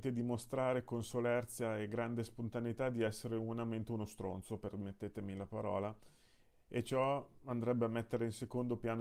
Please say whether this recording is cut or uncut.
uncut